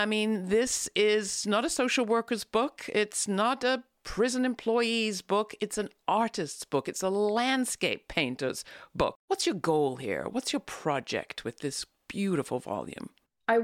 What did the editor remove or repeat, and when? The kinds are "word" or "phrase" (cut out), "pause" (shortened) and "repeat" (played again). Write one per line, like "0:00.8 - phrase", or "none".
0:09.2 - pause